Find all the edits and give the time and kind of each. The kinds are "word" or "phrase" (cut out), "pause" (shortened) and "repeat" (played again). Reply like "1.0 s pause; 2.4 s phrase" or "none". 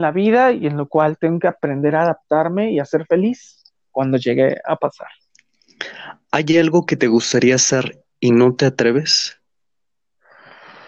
none